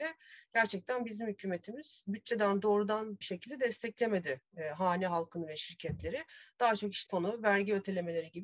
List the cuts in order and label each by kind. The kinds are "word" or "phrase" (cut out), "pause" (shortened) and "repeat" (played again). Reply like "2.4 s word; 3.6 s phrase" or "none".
3.2 s word; 7.1 s word